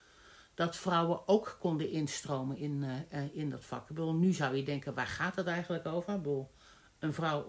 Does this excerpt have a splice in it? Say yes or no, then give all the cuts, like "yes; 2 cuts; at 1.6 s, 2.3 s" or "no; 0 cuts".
no; 0 cuts